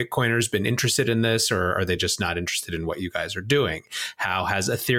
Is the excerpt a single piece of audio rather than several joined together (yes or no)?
yes